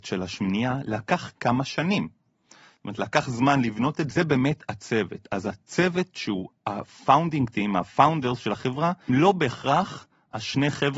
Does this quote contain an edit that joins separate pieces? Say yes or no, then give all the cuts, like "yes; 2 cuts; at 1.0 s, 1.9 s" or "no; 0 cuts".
yes; 2 cuts; at 4.1 s, 9.1 s